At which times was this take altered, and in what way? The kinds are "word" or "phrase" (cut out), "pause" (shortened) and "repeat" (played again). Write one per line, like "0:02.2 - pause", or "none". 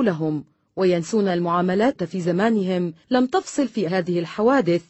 0:01.3 - word
0:01.9 - word
0:03.0 - pause
0:03.9 - word